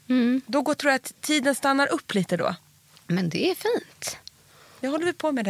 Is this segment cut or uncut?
uncut